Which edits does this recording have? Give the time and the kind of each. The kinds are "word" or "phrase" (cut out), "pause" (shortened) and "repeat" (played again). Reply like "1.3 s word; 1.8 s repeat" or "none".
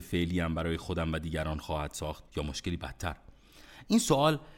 2.3 s pause

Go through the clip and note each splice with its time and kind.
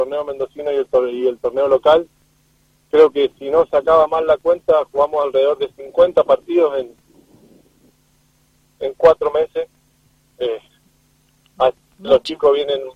none

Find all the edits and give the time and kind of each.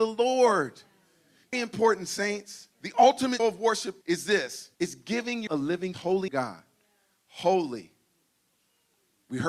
1.5 s word; 2.7 s pause; 3.4 s word; 4.0 s pause; 4.7 s pause; 5.5 s word; 5.9 s word; 6.3 s phrase

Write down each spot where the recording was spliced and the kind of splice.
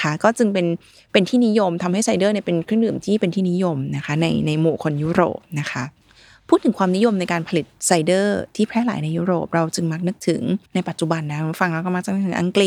6.0 s pause; 10.7 s pause

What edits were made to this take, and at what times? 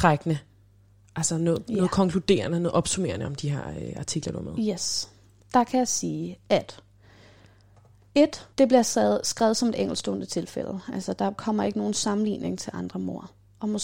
8.5 s pause

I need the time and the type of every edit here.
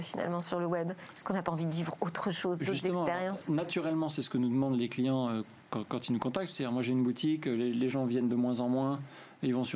none

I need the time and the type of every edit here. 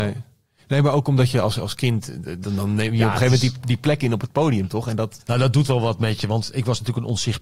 none

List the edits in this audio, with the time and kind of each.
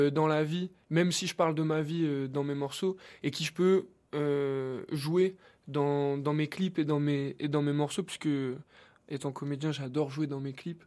none

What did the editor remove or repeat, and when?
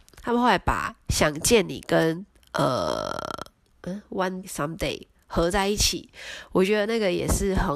3.7 s word; 4.4 s word

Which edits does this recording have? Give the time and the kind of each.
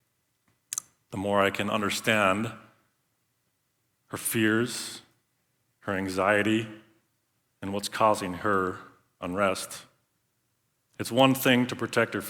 none

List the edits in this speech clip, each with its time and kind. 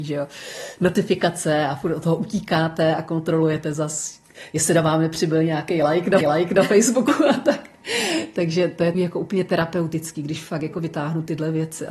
6.2 s repeat; 8.9 s word

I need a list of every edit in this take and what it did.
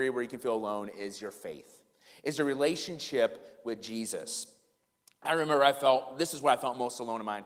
none

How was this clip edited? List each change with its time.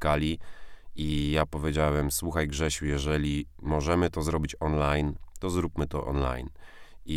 none

